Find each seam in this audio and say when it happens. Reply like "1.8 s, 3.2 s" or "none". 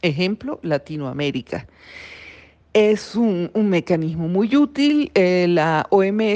none